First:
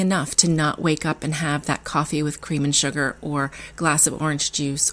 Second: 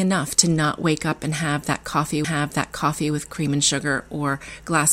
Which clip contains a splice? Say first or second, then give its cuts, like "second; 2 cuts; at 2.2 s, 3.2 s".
second; 1 cut; at 2.2 s